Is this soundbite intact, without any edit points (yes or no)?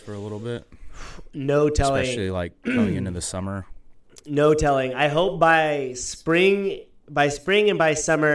yes